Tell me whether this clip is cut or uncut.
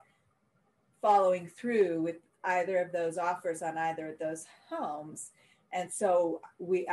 uncut